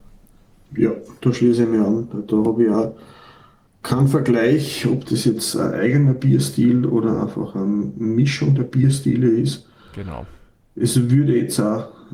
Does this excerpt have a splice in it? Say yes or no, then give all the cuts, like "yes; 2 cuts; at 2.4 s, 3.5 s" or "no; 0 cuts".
no; 0 cuts